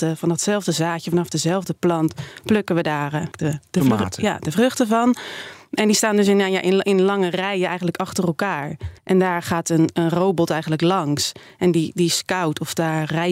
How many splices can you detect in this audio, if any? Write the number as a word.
two